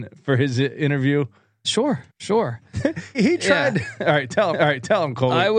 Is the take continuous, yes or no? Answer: no